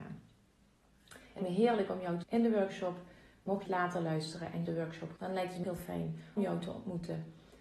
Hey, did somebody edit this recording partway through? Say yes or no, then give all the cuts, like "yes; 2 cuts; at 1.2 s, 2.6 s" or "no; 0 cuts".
yes; 7 cuts; at 1.4 s, 2.2 s, 3.7 s, 4.7 s, 5.2 s, 5.6 s, 6.4 s